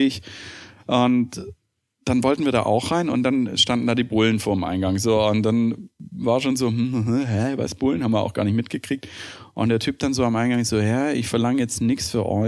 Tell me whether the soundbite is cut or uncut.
uncut